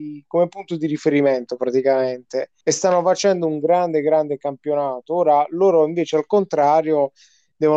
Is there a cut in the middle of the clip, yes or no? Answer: yes